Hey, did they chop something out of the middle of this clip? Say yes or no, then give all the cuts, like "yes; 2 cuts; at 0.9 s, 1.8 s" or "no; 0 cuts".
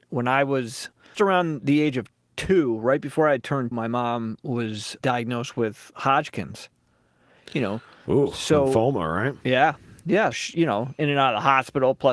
yes; 4 cuts; at 1.1 s, 3.7 s, 5.0 s, 10.3 s